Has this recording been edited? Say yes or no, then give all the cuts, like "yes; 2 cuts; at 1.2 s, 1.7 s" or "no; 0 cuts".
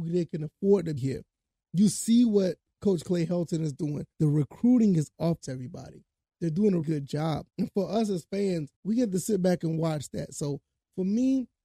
yes; 6 cuts; at 1.0 s, 4.1 s, 5.4 s, 6.8 s, 7.5 s, 8.8 s